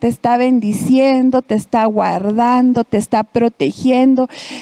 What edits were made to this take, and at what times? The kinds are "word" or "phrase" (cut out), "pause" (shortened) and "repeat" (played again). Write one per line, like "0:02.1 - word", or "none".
none